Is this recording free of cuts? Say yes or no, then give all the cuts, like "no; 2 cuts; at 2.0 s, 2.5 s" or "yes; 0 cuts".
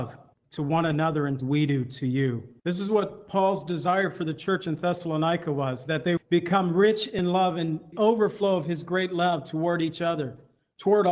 no; 4 cuts; at 1.4 s, 2.6 s, 6.2 s, 7.9 s